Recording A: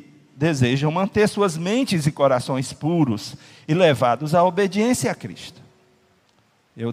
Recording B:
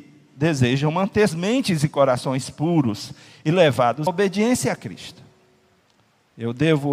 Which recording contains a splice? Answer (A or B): B